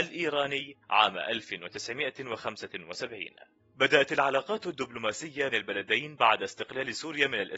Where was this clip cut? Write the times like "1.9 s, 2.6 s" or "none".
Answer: 3.6 s, 5.5 s

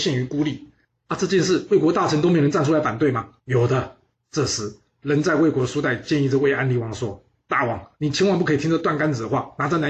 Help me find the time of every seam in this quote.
3.4 s, 4.1 s, 7.9 s

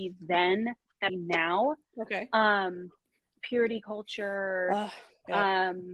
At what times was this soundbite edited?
1.1 s

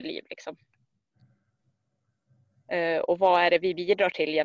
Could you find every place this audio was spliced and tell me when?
none

